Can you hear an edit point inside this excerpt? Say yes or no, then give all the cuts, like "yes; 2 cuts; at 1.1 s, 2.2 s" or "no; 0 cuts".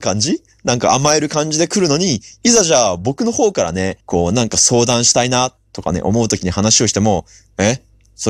yes; 1 cut; at 4.0 s